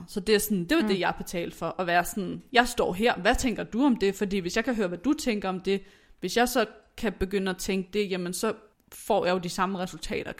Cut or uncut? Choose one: cut